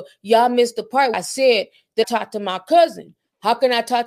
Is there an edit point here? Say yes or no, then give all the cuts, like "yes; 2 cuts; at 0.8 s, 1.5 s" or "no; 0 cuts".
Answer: yes; 2 cuts; at 1.1 s, 2.0 s